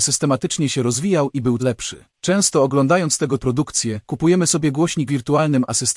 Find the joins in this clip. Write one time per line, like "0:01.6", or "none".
0:01.6
0:02.1
0:03.4
0:04.0
0:05.1

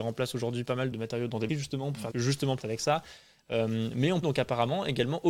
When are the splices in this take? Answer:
0:00.9
0:01.5
0:02.1
0:02.6
0:04.2

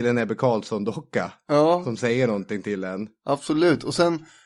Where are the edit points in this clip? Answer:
none

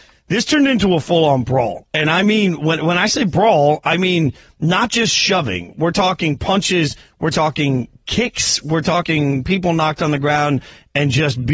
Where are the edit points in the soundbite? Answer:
none

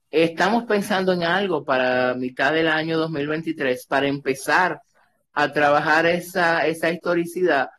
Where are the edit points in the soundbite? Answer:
none

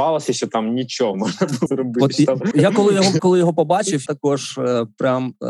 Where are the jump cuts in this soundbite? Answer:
0:01.1
0:01.7
0:02.5
0:03.2
0:04.1

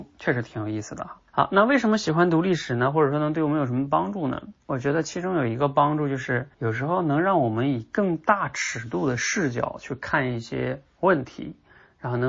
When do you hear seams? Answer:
0:01.3
0:04.6
0:06.5

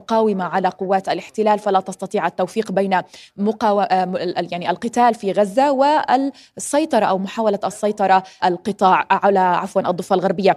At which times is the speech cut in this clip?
0:08.4

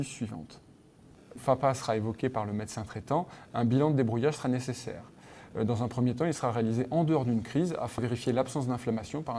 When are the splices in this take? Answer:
0:01.4
0:08.0

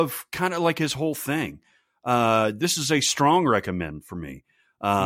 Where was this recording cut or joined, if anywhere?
none

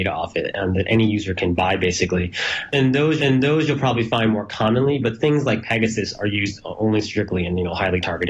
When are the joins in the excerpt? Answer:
0:03.2

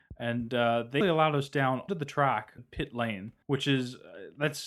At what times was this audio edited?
0:01.0
0:01.9
0:02.6
0:03.4

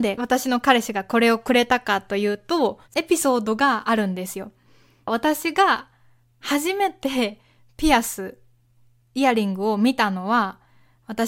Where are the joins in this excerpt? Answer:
0:02.8

